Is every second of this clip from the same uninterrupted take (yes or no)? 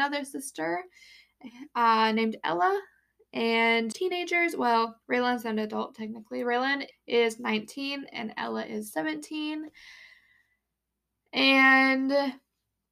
no